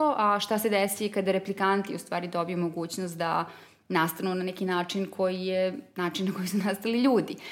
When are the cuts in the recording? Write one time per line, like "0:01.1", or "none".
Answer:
none